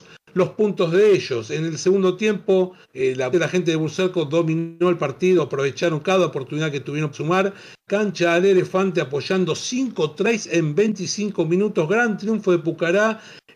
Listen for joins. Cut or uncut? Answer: cut